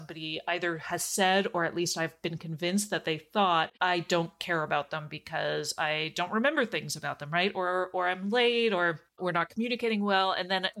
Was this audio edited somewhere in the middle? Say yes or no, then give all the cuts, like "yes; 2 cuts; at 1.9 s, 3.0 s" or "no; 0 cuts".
yes; 2 cuts; at 3.8 s, 9.1 s